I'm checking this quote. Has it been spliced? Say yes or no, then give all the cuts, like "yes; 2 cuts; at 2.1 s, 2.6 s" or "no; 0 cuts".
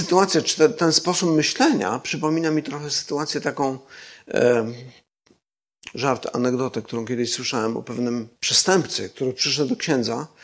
yes; 1 cut; at 8.4 s